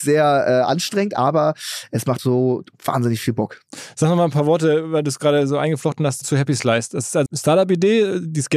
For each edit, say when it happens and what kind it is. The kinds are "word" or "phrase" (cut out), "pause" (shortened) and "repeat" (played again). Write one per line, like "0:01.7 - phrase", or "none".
0:02.2 - word
0:06.2 - word
0:07.3 - phrase